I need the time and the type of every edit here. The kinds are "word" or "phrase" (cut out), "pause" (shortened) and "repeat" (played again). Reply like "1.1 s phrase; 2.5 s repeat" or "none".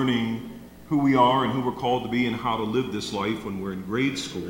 none